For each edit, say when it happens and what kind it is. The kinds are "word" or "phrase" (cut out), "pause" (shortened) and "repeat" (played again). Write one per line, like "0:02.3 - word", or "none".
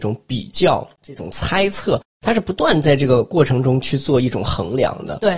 0:01.0 - phrase